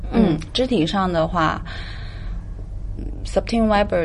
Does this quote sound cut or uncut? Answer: cut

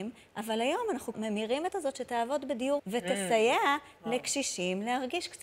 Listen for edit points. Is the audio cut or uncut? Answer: cut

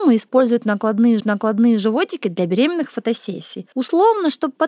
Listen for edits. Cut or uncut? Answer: cut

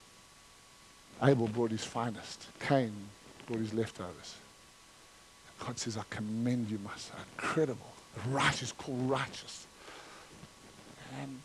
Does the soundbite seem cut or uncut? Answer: cut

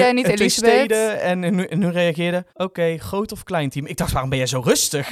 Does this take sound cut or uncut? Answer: cut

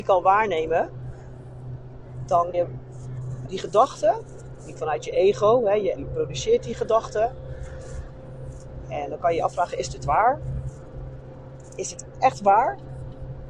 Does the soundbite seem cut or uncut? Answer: cut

